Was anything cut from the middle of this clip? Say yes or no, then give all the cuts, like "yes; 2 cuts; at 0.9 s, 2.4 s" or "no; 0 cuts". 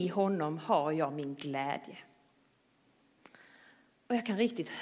no; 0 cuts